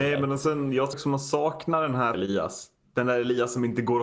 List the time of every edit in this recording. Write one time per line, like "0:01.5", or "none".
0:00.9
0:02.1